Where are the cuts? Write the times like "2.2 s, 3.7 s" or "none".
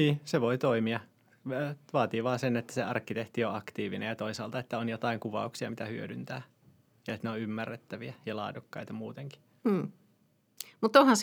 none